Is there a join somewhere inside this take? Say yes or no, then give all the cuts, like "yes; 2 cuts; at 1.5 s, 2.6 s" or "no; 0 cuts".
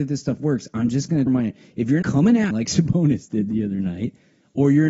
yes; 3 cuts; at 1.3 s, 2.0 s, 2.5 s